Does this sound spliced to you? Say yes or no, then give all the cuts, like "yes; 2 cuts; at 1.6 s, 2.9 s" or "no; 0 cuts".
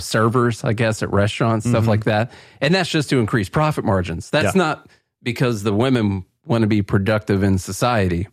no; 0 cuts